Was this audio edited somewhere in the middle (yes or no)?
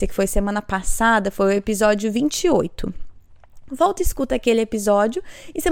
no